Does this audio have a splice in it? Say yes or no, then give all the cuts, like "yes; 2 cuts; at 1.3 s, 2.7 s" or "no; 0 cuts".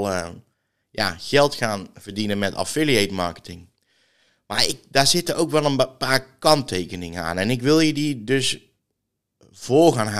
no; 0 cuts